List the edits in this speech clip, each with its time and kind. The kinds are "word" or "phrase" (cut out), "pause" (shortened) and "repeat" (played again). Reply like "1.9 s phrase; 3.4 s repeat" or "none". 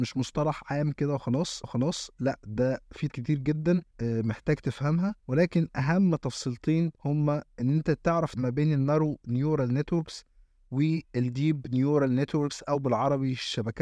1.6 s repeat; 3.1 s word; 3.9 s pause; 5.2 s pause; 7.0 s pause; 8.3 s word; 11.0 s pause